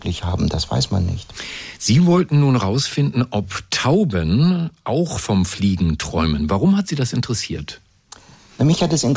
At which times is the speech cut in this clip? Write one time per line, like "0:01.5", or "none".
none